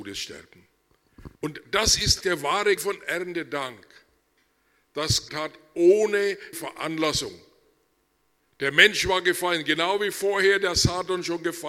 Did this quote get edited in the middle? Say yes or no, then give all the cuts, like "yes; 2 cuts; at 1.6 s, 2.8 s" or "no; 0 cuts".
yes; 5 cuts; at 1.4 s, 2.2 s, 2.8 s, 5.3 s, 6.5 s